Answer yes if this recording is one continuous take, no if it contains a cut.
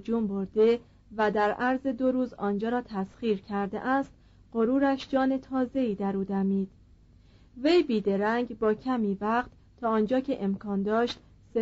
yes